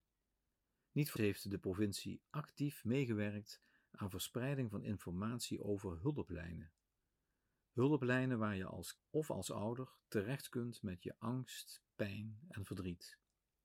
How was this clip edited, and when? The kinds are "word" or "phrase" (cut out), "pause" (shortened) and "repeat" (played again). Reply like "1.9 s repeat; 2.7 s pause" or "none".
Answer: 1.2 s word; 9.0 s word